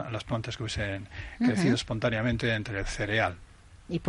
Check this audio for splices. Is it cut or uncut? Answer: uncut